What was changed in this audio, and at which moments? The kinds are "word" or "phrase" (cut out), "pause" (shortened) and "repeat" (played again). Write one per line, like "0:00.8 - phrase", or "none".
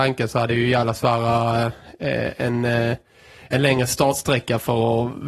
none